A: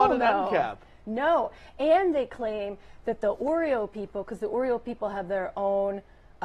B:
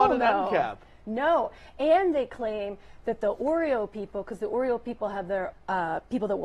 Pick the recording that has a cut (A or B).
B